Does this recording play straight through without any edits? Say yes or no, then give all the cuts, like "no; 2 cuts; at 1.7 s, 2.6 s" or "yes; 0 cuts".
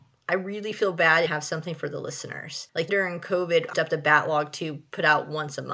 no; 3 cuts; at 1.3 s, 2.9 s, 3.7 s